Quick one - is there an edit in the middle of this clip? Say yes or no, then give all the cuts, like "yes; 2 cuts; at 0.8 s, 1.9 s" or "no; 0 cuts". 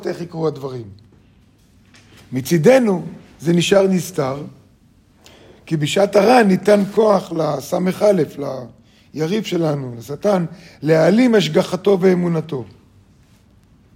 no; 0 cuts